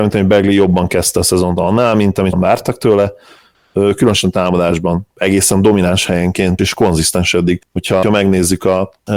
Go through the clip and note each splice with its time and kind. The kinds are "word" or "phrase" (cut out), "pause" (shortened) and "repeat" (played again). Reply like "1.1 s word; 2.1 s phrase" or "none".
2.3 s word; 6.6 s word; 8.0 s word